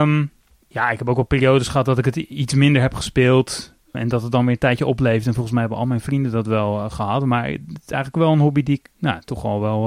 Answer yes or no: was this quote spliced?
yes